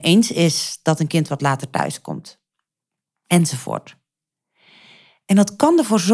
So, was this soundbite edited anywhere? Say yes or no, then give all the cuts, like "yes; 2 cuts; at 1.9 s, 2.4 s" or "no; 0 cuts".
no; 0 cuts